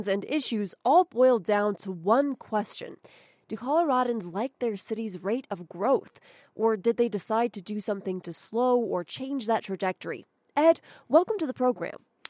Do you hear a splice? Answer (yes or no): no